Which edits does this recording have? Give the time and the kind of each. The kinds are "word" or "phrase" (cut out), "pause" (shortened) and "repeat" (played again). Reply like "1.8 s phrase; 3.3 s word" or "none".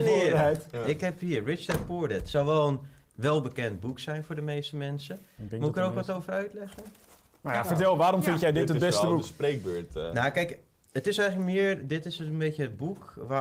none